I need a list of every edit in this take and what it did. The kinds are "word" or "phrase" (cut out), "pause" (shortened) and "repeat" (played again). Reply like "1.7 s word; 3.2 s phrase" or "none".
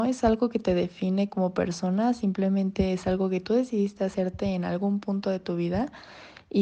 none